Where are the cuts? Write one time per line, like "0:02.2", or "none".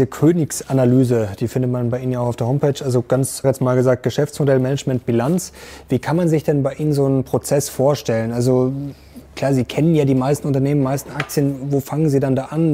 0:03.4